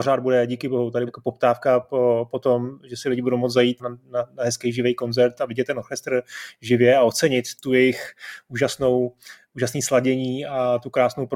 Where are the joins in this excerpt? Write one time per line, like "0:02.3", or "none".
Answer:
0:01.1
0:03.8
0:07.5